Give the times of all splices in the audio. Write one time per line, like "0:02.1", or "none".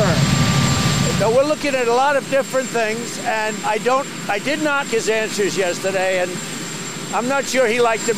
0:03.6
0:04.8